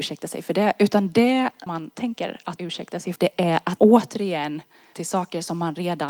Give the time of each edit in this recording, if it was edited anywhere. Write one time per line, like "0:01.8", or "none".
0:01.7
0:02.6
0:03.2
0:03.8
0:04.9